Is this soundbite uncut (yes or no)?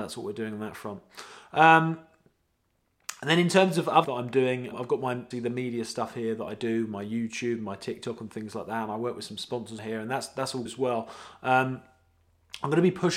no